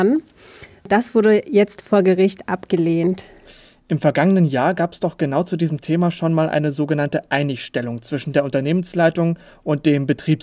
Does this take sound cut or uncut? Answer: uncut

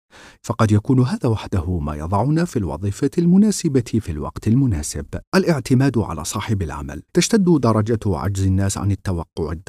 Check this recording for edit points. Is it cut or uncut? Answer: cut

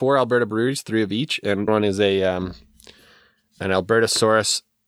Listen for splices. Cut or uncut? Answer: cut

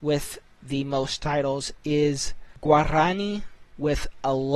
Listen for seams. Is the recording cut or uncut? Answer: uncut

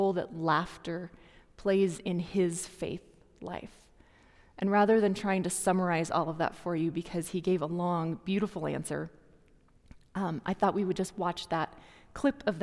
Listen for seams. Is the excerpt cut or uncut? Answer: uncut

